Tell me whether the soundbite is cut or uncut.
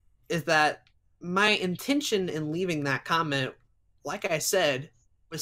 uncut